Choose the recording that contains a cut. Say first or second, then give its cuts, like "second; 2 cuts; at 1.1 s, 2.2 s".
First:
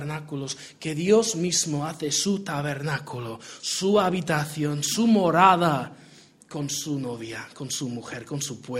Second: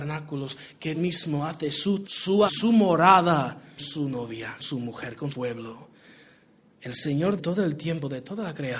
second; 7 cuts; at 0.9 s, 2.0 s, 2.5 s, 3.8 s, 4.6 s, 5.3 s, 7.4 s